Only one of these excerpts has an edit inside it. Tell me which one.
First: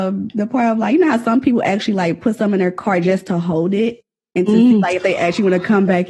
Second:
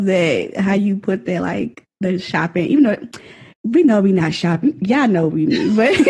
second; 1 cut; at 3.5 s

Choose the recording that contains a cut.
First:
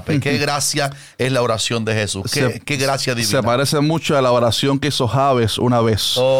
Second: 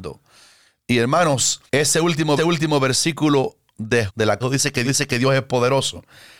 second; 5 cuts; at 1.7 s, 2.4 s, 4.1 s, 4.4 s, 4.8 s

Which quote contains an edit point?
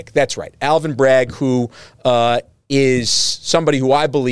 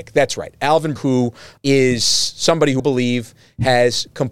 second; 3 cuts; at 1.0 s, 1.6 s, 2.8 s

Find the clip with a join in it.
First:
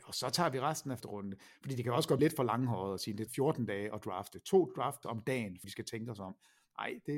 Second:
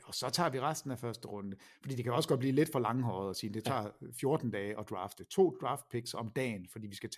first; 5 cuts; at 1.0 s, 2.2 s, 3.3 s, 5.0 s, 5.6 s

